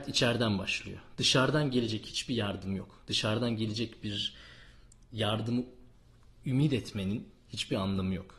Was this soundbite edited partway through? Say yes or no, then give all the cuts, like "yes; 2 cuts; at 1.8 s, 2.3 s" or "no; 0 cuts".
no; 0 cuts